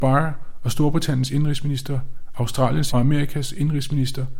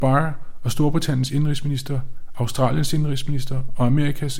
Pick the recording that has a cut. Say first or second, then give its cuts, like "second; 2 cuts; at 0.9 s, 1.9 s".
first; 1 cut; at 2.9 s